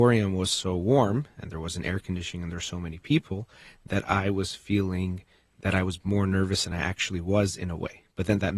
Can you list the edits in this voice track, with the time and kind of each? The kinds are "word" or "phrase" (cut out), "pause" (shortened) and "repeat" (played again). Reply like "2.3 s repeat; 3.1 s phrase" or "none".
none